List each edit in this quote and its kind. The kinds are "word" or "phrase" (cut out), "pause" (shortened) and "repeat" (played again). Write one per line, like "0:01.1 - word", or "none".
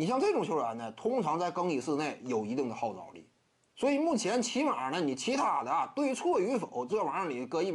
none